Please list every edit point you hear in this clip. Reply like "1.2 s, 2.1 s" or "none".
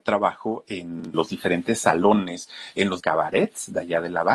1.1 s, 3.0 s